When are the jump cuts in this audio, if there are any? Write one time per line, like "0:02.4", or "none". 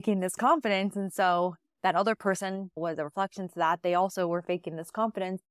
none